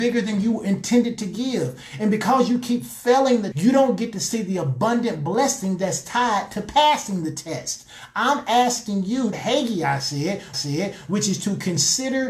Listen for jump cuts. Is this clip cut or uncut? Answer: cut